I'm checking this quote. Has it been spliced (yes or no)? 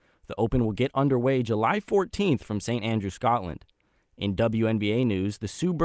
no